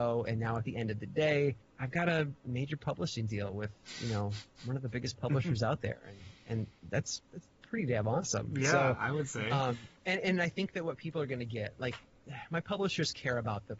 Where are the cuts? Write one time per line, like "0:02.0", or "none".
0:01.6
0:02.4
0:07.5
0:10.0